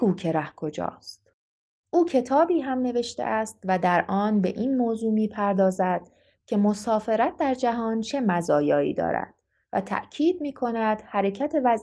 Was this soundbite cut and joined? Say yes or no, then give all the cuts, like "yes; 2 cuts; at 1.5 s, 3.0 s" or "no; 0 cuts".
no; 0 cuts